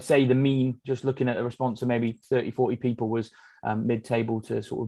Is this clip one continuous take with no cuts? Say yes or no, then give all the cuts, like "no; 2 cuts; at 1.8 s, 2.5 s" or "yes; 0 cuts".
yes; 0 cuts